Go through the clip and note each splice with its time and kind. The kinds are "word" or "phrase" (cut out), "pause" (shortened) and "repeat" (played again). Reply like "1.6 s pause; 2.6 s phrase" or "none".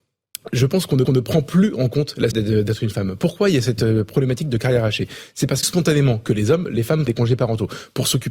1.0 s repeat; 2.3 s phrase; 5.6 s phrase; 7.1 s word